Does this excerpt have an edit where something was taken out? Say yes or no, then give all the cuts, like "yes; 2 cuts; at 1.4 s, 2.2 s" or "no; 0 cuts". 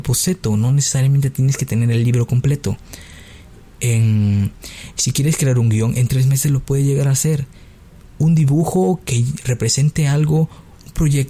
no; 0 cuts